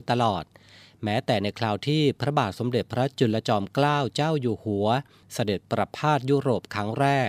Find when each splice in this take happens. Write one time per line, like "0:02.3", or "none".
none